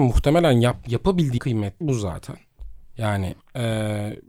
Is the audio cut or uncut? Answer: cut